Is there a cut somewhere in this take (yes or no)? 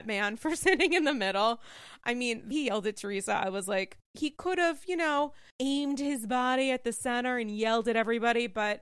yes